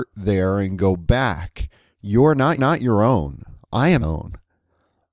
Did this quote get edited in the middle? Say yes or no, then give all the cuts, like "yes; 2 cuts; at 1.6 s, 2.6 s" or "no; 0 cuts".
yes; 2 cuts; at 2.6 s, 4.0 s